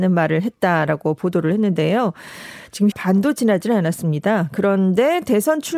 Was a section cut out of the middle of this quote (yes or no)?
yes